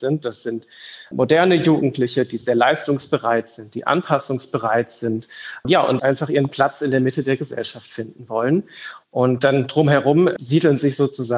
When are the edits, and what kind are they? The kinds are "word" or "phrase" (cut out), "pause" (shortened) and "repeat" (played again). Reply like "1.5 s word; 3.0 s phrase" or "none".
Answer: 6.0 s word

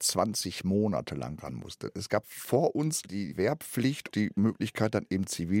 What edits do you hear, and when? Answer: 2.2 s word; 4.1 s word

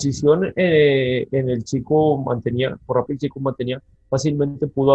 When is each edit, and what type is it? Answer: 3.1 s word

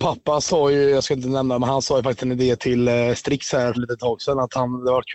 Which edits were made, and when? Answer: 3.7 s word

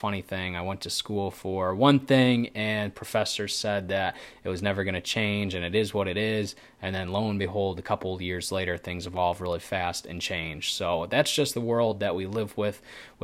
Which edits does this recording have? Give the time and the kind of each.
none

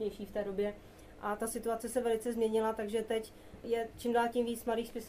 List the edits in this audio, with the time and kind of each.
none

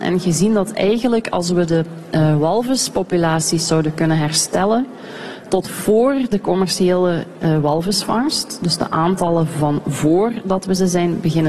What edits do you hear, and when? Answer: none

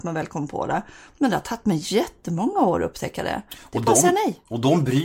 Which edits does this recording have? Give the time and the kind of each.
none

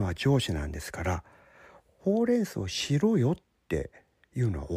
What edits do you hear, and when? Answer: none

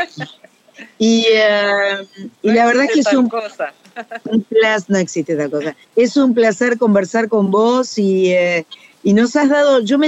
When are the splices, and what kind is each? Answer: 5.8 s pause

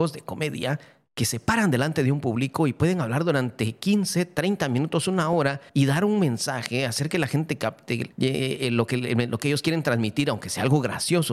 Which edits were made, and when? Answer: 5.7 s pause; 8.1 s word

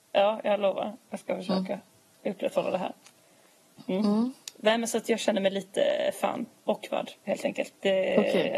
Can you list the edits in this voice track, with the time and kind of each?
none

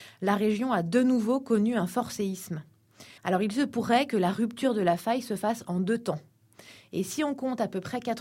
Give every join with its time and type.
3.2 s pause

